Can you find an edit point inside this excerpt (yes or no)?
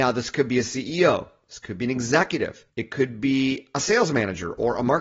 yes